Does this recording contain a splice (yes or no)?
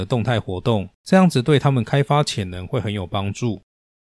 yes